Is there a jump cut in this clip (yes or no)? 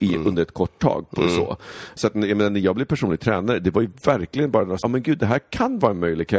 yes